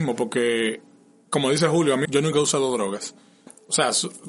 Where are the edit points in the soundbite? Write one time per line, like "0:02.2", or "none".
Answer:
0:02.0